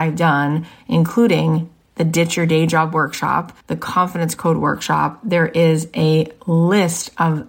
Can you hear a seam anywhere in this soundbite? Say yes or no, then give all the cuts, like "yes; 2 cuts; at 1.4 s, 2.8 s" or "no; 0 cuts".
yes; 1 cut; at 3.6 s